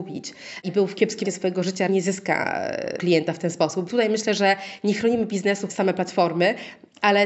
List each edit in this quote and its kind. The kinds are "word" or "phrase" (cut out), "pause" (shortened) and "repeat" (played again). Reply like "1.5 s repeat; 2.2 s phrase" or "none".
1.2 s word; 1.9 s word; 3.0 s word; 3.9 s word; 5.7 s word